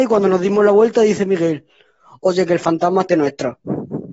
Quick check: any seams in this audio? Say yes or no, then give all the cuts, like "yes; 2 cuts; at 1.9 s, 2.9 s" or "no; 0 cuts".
yes; 1 cut; at 3.1 s